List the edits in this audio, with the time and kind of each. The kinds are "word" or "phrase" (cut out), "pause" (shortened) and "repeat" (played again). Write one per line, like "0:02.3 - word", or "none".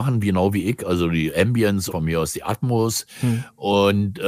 0:01.9 - word

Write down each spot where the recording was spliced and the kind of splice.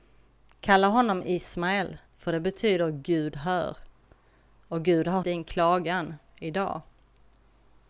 0:02.1 - pause
0:05.2 - word

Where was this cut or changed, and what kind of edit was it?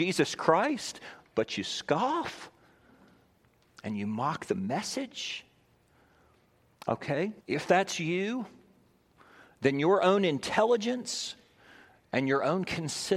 0:07.4 - pause

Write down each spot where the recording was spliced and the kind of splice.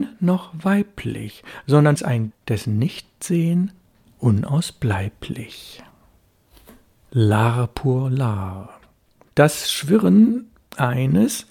0:02.0 - word
0:02.3 - word

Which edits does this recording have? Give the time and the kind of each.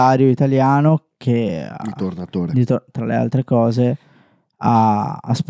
none

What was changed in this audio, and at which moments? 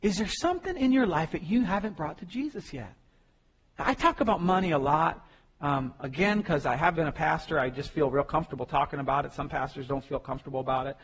0:06.9 - word

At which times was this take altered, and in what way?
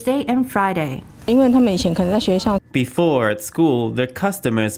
0:02.6 - pause

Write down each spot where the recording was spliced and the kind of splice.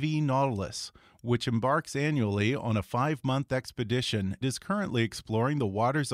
0:04.4 - word

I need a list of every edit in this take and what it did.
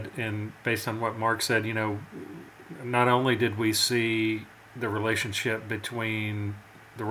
none

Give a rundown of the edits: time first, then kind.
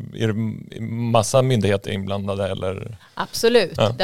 none

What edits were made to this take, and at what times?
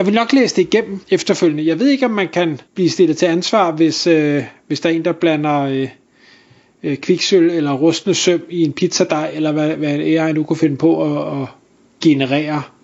0:01.0 - pause
0:02.7 - pause

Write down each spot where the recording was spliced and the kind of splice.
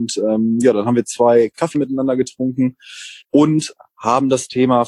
0:01.7 - word
0:03.2 - pause

